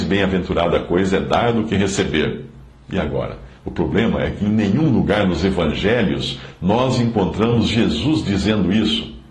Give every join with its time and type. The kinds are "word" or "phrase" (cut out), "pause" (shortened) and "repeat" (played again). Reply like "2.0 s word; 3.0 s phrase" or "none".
2.7 s pause; 3.6 s pause